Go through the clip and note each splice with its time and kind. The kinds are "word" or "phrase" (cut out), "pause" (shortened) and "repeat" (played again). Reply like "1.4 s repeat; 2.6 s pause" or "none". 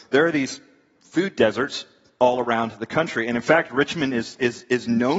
none